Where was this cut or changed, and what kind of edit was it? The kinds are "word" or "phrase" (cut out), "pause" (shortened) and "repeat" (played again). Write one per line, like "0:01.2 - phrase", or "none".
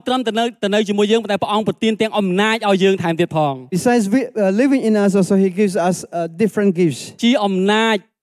none

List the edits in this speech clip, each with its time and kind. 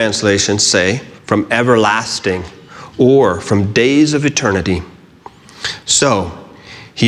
0:01.2 - pause

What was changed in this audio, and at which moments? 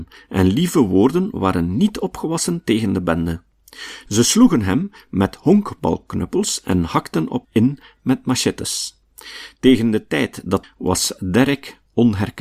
0:07.4 - word
0:10.6 - phrase

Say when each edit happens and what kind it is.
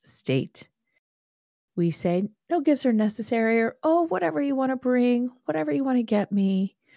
none

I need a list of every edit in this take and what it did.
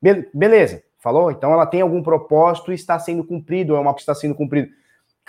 0:00.9 - pause
0:04.0 - word

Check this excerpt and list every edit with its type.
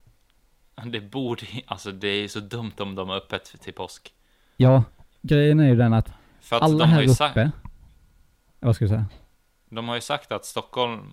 none

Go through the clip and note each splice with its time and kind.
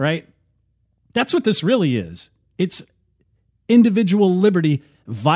none

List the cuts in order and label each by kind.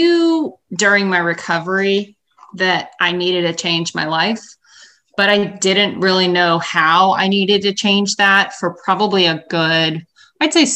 none

